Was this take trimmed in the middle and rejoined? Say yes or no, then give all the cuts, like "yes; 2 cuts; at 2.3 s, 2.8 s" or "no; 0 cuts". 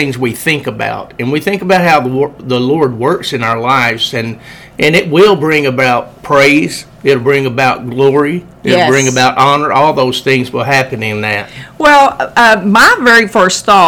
no; 0 cuts